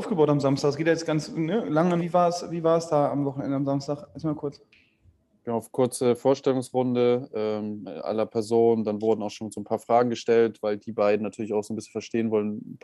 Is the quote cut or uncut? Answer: cut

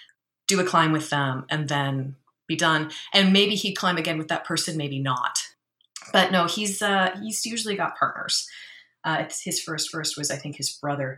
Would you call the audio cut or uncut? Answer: cut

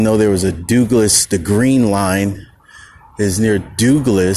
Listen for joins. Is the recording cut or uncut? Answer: uncut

